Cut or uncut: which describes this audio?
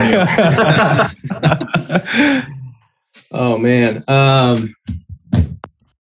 uncut